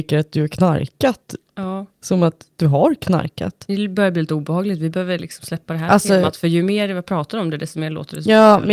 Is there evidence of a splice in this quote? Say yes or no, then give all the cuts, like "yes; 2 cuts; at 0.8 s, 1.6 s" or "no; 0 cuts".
no; 0 cuts